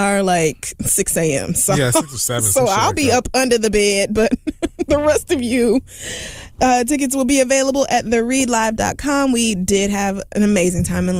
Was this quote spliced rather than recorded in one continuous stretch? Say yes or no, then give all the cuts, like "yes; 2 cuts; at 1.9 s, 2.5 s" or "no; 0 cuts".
no; 0 cuts